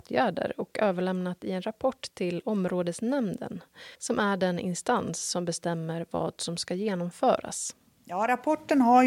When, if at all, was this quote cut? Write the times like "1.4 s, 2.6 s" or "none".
3.9 s

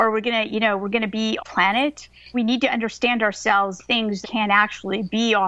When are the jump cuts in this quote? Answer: 1.4 s, 2.3 s, 3.8 s, 4.2 s

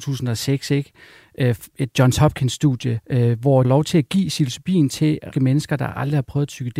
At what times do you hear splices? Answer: 3.0 s, 3.6 s, 5.3 s

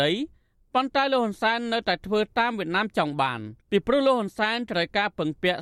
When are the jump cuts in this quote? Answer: 3.6 s

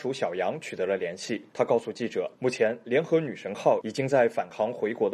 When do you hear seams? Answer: 1.5 s, 2.3 s

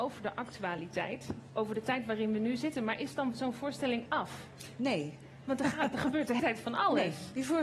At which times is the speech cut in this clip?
4.1 s, 6.4 s

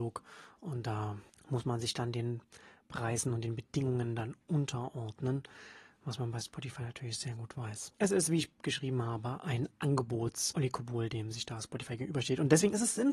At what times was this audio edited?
none

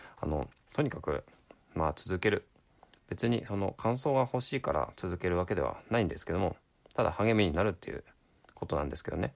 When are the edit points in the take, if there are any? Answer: none

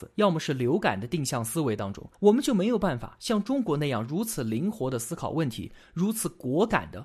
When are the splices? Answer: 2.1 s

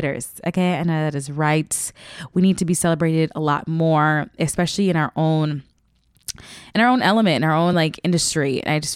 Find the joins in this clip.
none

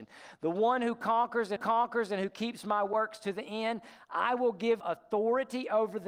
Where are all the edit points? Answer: 1.6 s, 4.8 s

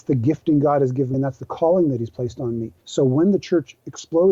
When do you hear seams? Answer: 1.1 s, 2.8 s

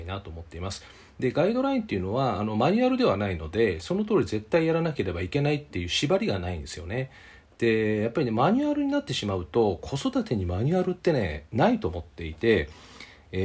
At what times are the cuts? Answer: none

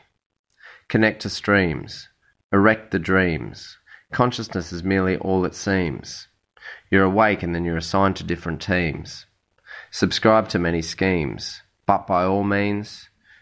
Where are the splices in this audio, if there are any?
none

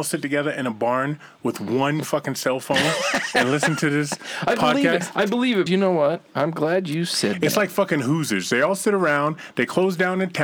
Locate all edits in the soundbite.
5.7 s

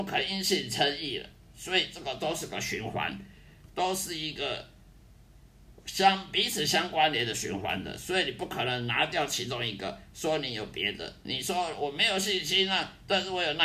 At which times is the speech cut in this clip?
none

